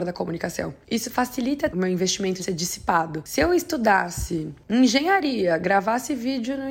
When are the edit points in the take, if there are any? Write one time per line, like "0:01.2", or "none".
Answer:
0:01.7
0:02.4

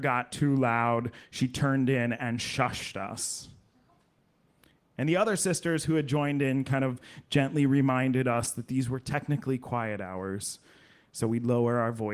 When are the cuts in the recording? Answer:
none

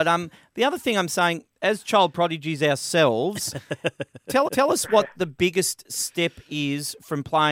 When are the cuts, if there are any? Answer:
0:04.4

